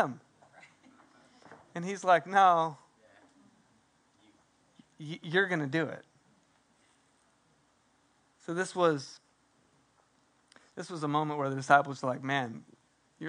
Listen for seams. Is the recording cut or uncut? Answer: uncut